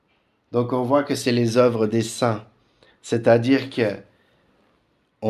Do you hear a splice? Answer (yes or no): no